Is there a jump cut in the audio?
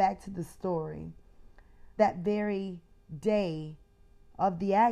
yes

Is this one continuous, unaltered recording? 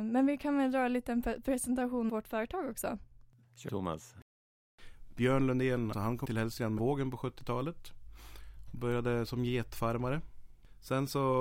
no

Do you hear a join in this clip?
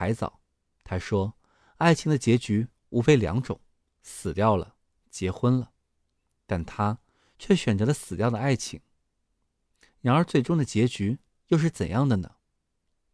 no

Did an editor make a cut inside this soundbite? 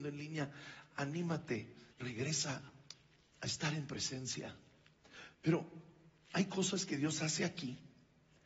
yes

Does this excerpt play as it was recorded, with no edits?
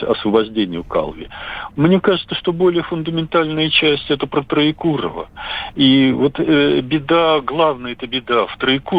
yes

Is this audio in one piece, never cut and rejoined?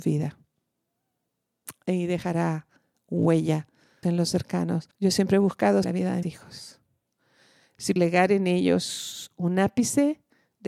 no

